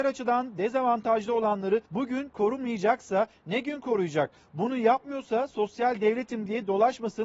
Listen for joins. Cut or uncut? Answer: cut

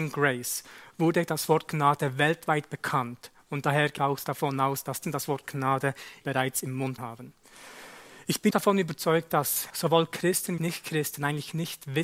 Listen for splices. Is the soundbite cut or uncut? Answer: cut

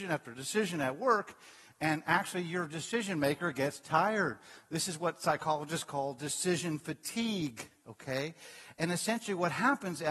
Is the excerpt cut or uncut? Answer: uncut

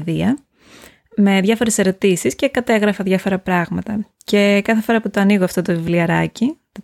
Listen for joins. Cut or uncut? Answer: uncut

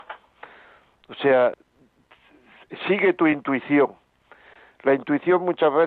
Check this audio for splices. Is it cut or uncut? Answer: uncut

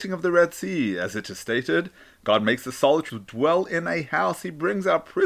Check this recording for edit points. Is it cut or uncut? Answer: cut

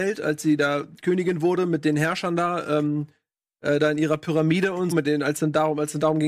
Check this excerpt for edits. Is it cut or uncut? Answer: cut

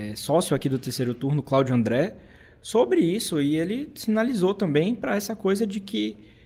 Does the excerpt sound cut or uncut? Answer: uncut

